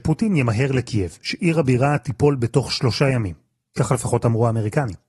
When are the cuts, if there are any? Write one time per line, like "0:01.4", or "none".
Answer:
none